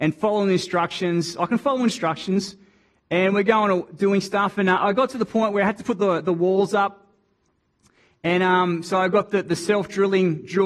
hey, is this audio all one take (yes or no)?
yes